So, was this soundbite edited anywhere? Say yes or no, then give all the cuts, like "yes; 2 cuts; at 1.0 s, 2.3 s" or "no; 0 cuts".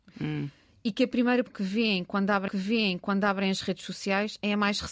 yes; 2 cuts; at 1.5 s, 2.5 s